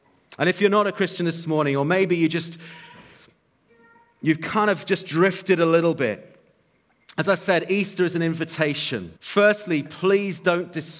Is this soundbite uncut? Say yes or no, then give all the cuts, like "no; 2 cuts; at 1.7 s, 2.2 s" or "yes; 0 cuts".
no; 1 cut; at 9.2 s